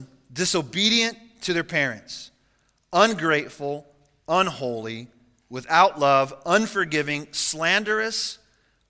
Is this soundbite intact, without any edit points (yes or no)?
yes